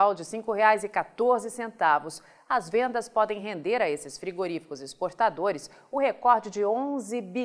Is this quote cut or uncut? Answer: uncut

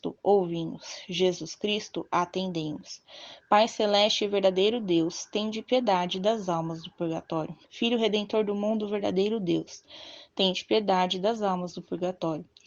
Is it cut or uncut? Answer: cut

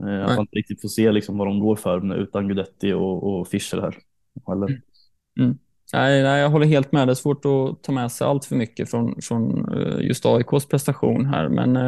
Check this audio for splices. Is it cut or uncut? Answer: uncut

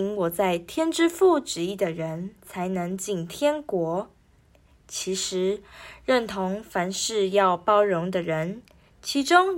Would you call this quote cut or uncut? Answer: uncut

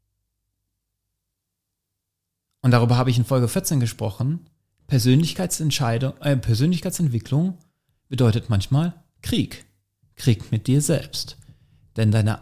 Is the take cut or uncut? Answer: uncut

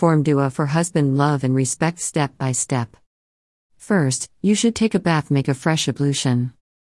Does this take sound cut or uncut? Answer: uncut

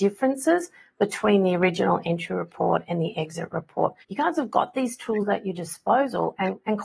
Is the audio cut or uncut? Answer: cut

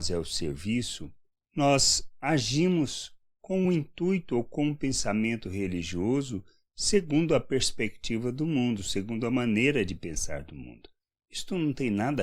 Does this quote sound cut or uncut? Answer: uncut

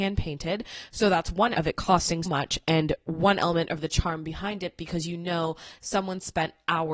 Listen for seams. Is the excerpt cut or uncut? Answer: cut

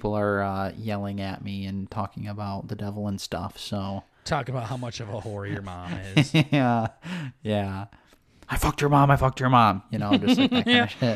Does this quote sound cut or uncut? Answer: uncut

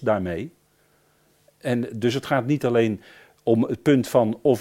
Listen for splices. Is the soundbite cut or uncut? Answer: uncut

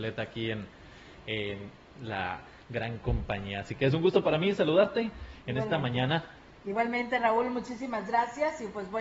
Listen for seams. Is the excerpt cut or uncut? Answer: uncut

